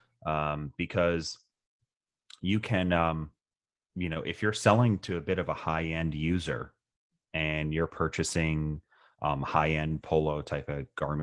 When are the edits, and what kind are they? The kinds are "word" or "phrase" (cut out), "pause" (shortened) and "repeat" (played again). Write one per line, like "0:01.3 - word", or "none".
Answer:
none